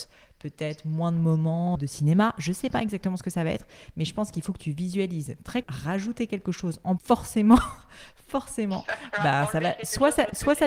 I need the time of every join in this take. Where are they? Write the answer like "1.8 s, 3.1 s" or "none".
1.7 s, 5.6 s, 7.0 s